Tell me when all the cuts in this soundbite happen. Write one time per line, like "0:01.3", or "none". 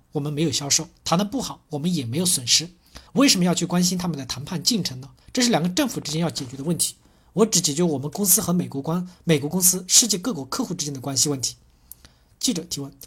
0:03.1
0:05.2